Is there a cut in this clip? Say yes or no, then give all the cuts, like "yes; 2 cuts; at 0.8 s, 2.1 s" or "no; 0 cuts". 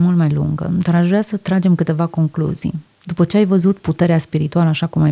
no; 0 cuts